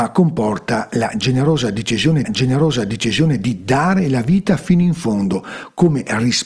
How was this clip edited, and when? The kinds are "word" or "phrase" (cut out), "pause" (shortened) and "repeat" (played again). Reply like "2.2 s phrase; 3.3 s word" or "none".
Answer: 2.2 s repeat